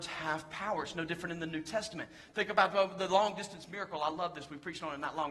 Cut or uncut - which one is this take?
uncut